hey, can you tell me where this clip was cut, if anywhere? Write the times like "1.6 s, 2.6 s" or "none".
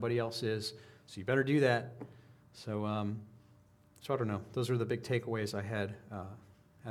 none